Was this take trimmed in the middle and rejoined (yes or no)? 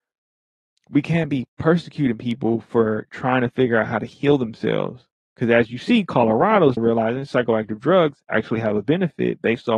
yes